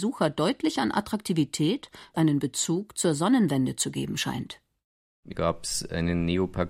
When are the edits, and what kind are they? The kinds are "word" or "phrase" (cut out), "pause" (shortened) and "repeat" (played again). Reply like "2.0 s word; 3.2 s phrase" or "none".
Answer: 2.1 s phrase; 5.3 s phrase